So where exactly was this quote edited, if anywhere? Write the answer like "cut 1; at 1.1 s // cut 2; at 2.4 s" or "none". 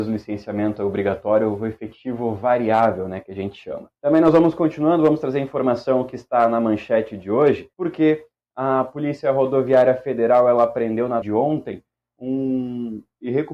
cut 1; at 4.0 s // cut 2; at 7.7 s // cut 3; at 11.2 s